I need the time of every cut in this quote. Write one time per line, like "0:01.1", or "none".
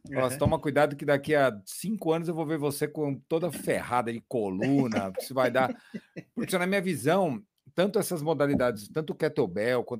0:06.5